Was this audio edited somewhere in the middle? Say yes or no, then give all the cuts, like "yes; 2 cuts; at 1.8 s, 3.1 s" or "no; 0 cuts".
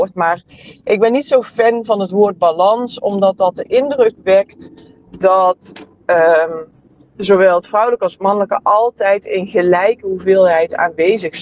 no; 0 cuts